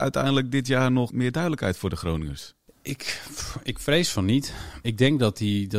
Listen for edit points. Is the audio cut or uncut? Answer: uncut